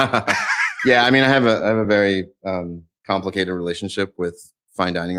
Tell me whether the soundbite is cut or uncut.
uncut